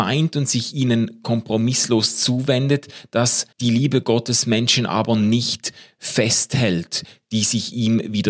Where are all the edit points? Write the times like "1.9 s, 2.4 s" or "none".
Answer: 3.5 s